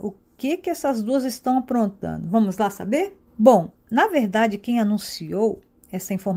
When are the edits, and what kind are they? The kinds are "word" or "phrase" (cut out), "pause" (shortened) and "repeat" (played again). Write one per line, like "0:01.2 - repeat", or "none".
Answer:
0:03.3 - pause